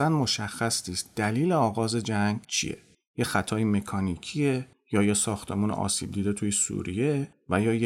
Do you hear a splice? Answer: yes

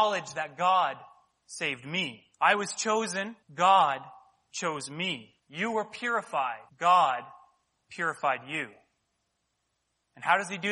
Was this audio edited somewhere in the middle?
yes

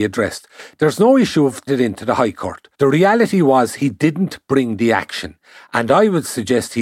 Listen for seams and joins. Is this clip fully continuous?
no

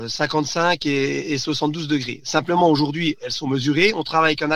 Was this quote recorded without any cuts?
yes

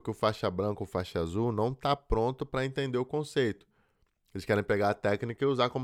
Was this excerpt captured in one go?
yes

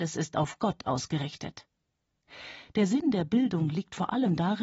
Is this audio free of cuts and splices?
yes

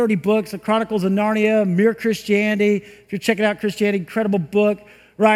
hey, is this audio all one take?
yes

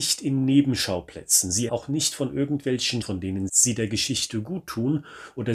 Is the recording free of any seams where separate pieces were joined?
no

